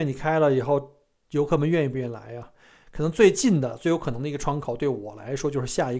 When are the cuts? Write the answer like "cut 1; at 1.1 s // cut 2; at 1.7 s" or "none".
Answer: none